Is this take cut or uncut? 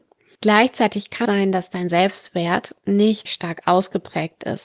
cut